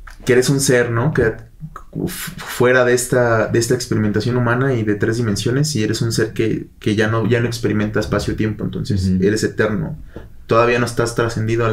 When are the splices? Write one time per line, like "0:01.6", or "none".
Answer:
none